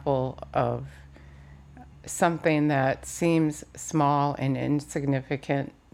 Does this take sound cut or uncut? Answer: uncut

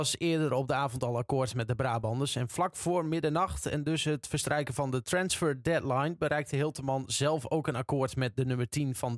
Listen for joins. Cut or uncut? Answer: uncut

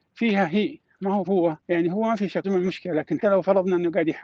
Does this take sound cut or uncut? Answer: cut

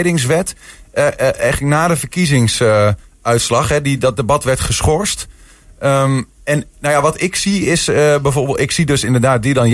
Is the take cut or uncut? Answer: uncut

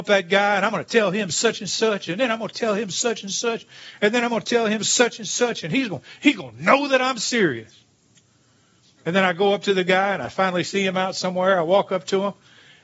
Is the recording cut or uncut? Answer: uncut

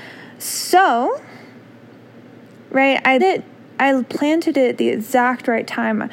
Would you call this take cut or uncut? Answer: cut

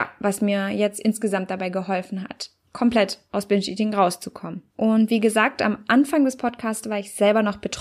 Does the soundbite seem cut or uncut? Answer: cut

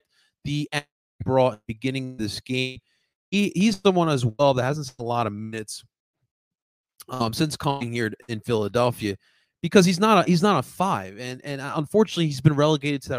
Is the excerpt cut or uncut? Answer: uncut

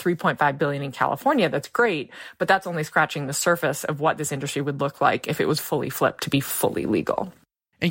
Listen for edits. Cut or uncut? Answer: uncut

